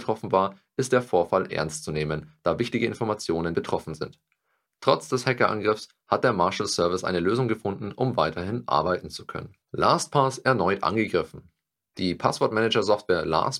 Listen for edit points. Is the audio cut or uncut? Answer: cut